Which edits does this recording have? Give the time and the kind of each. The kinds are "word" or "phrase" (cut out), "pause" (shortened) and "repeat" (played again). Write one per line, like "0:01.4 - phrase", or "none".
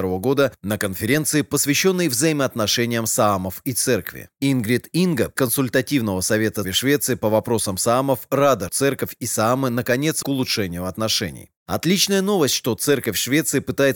0:05.4 - word
0:06.6 - word
0:08.7 - word
0:10.2 - phrase

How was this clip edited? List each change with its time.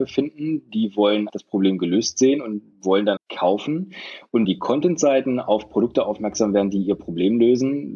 0:01.3 - word
0:03.2 - word
0:04.4 - phrase

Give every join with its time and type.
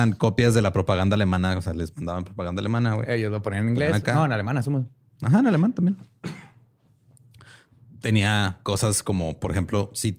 none

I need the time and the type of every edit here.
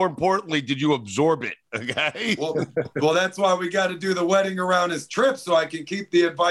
none

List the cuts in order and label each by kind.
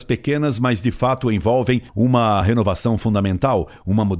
none

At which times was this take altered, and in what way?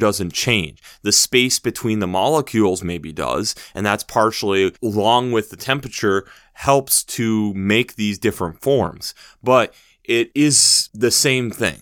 0:04.7 - pause

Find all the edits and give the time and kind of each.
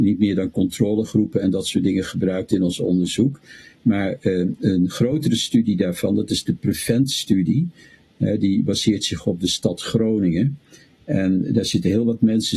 none

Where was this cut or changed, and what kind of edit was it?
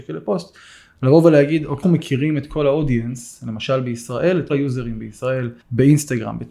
0:01.8 - word
0:04.5 - word
0:05.6 - pause

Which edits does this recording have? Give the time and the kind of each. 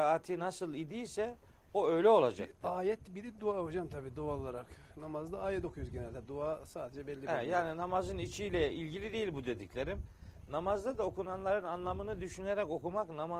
none

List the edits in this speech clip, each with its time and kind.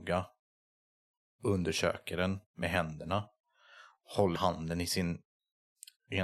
0:02.5 - pause
0:04.4 - word

